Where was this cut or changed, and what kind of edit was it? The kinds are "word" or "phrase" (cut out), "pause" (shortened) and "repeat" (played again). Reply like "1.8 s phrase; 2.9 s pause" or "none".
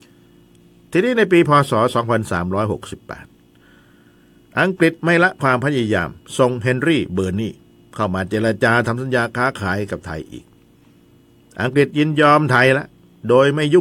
none